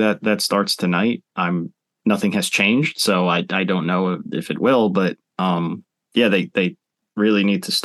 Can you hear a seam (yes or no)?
no